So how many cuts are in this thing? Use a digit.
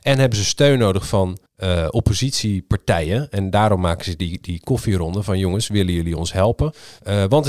1